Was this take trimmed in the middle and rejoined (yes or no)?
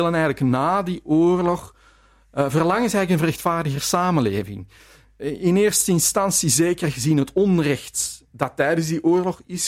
no